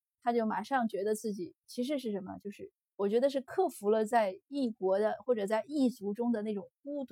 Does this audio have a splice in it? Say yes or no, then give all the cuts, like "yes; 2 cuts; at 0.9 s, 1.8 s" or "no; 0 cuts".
yes; 1 cut; at 2.9 s